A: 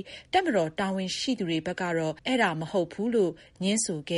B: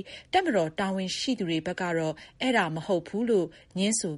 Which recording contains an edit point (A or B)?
A